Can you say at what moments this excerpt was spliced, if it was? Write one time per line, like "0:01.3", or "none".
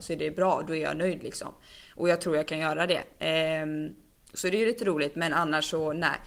none